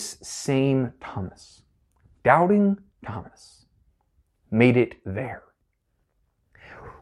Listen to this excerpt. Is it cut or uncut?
uncut